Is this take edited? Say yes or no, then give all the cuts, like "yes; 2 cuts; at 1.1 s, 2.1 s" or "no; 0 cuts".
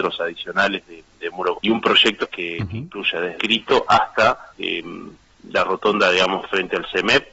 yes; 4 cuts; at 1.5 s, 2.2 s, 3.4 s, 4.5 s